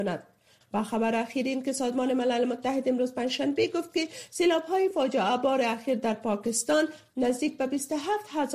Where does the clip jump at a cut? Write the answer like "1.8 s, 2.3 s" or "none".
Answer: none